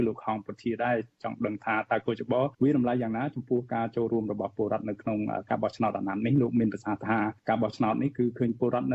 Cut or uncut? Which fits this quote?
cut